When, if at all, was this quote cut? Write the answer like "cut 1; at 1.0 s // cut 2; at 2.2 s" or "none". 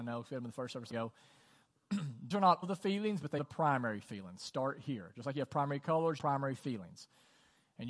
cut 1; at 0.9 s // cut 2; at 2.3 s // cut 3; at 2.6 s // cut 4; at 3.4 s // cut 5; at 6.2 s